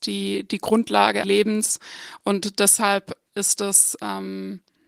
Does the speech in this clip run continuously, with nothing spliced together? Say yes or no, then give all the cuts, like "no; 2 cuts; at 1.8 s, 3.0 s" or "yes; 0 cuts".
no; 2 cuts; at 1.2 s, 3.3 s